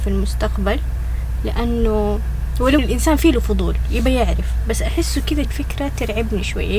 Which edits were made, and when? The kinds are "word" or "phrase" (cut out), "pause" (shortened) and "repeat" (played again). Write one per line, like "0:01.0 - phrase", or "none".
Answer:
0:02.8 - word
0:05.4 - word